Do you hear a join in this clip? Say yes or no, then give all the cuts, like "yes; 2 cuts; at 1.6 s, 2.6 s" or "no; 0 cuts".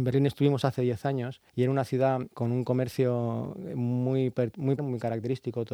yes; 3 cuts; at 1.5 s, 2.3 s, 4.8 s